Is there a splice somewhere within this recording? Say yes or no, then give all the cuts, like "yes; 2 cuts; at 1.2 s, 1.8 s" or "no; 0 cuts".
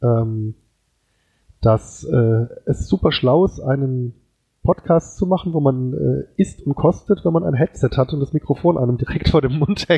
no; 0 cuts